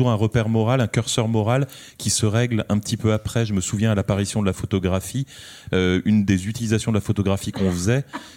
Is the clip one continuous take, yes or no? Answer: yes